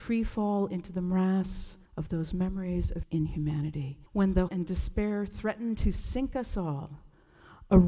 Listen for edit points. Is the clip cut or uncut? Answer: cut